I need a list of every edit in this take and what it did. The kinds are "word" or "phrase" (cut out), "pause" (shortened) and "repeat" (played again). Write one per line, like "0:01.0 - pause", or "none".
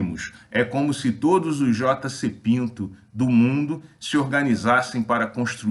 none

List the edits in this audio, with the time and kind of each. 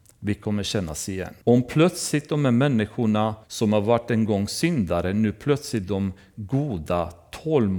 0:01.4 - pause
0:03.4 - pause
0:05.8 - word

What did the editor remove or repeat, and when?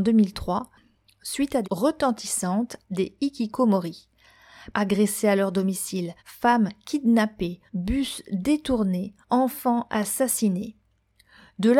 0:01.6 - phrase
0:02.8 - word
0:04.7 - word
0:06.2 - pause
0:07.7 - pause
0:09.2 - pause

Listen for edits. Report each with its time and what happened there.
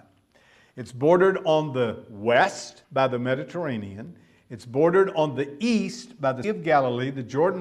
0:02.8 - pause
0:06.4 - word

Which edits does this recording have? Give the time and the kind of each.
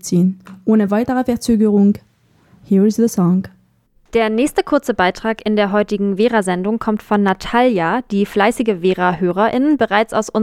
0:03.9 - pause

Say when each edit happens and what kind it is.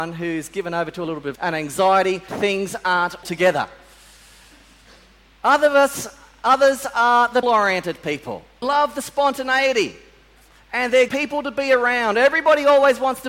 0:01.4 - word
0:02.3 - word
0:03.2 - word
0:07.4 - word
0:08.6 - word
0:11.1 - word

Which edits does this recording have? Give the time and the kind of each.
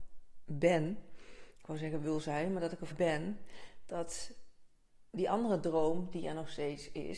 0:02.9 - word

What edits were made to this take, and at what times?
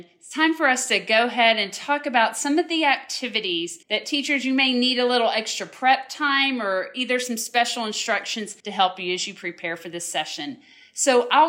0:03.8 - pause
0:08.6 - pause

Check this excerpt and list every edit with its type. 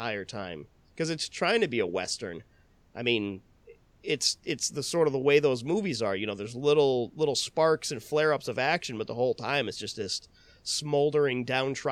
none

